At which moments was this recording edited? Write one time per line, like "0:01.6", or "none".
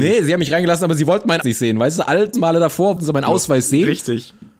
0:01.4
0:02.3
0:03.0

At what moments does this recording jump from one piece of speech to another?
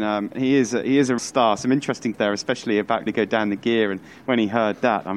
0:01.2
0:02.1
0:03.1

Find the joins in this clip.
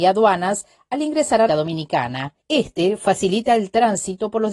0:01.5
0:02.4

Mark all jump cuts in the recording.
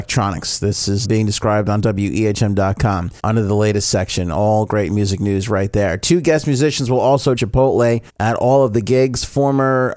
0:01.0
0:03.2
0:07.4
0:08.1

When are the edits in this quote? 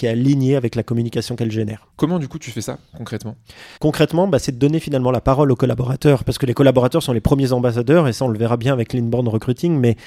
0:01.9
0:03.8

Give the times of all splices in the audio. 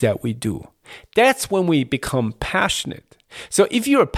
none

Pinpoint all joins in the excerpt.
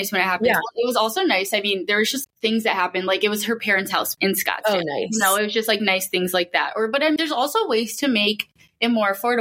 0:02.2
0:04.1
0:07.2

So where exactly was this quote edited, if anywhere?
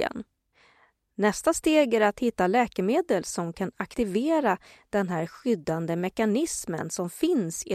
none

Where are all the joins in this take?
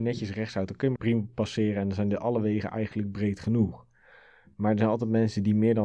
0:01.0

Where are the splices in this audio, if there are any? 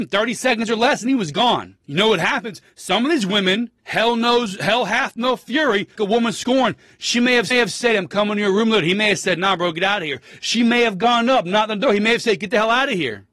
0:01.8
0:03.8
0:06.0
0:07.5

